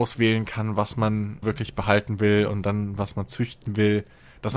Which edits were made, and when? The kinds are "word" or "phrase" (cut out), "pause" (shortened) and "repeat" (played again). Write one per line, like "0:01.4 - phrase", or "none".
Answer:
0:01.4 - word